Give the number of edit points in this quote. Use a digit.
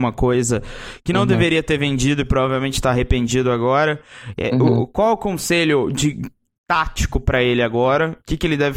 0